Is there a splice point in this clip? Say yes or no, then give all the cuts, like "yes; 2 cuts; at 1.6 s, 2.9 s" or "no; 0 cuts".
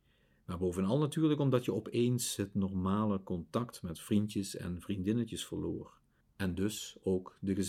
yes; 1 cut; at 6.2 s